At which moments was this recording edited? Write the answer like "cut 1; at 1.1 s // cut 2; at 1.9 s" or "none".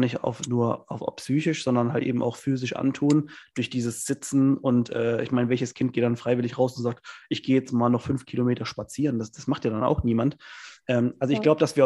none